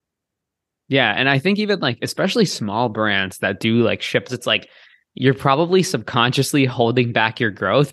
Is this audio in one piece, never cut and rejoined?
no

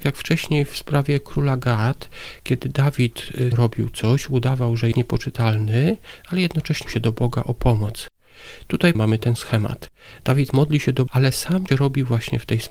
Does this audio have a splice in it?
yes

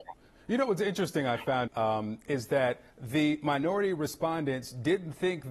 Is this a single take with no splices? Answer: no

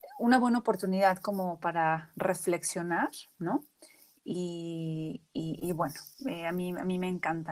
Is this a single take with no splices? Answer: yes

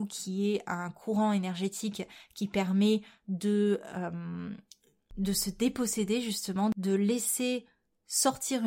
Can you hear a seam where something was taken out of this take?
no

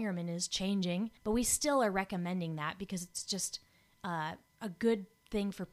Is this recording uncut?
no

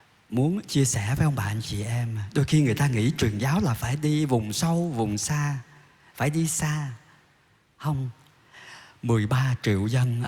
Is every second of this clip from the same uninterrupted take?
yes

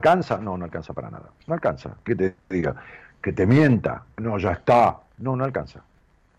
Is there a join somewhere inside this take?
yes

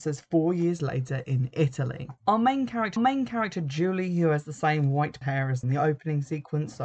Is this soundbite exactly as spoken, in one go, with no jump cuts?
no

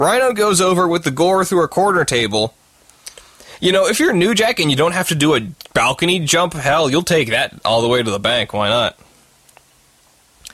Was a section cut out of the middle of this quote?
no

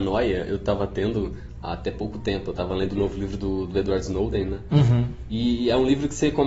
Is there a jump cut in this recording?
no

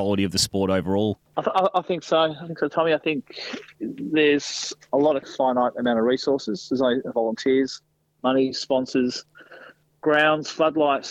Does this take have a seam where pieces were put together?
yes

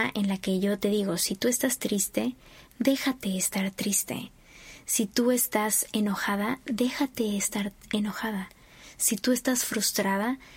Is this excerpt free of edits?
yes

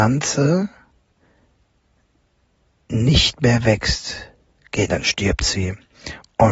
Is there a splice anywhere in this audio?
yes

